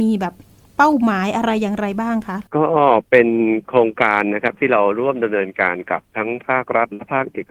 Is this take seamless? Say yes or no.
no